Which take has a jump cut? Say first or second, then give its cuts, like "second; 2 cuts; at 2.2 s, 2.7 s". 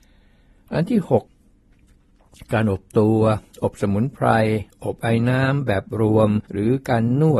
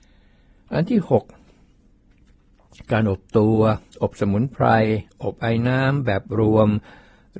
first; 2 cuts; at 1.3 s, 6.5 s